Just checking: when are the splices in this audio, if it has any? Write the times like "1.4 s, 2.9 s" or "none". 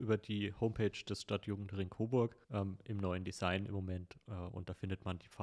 2.4 s